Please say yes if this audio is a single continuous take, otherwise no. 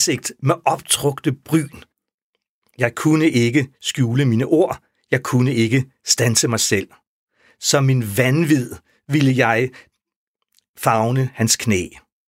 yes